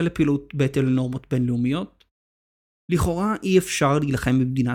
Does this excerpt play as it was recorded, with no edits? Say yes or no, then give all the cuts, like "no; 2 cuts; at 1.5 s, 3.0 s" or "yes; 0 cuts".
yes; 0 cuts